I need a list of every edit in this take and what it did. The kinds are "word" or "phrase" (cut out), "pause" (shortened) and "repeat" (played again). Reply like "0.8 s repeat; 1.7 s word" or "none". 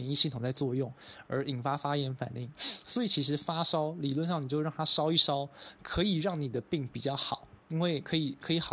7.6 s pause